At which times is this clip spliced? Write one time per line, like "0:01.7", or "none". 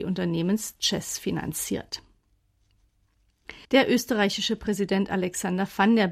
0:03.6